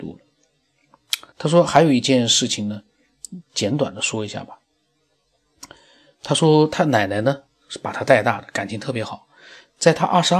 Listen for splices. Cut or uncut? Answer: cut